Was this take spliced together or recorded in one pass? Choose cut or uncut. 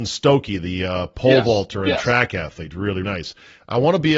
cut